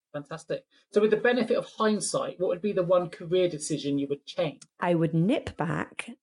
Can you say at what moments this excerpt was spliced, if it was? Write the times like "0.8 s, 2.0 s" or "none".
4.7 s